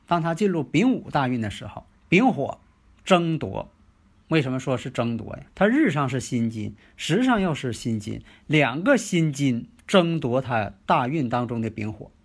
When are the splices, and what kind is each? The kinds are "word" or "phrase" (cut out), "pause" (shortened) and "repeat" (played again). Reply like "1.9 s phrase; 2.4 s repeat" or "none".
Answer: 2.0 s pause; 2.7 s pause; 4.1 s pause; 5.5 s pause